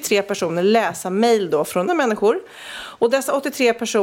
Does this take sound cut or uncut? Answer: cut